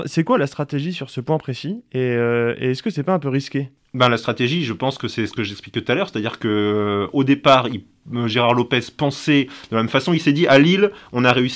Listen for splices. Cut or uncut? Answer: uncut